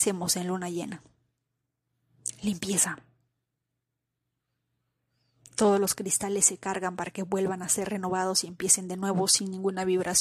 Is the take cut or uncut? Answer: uncut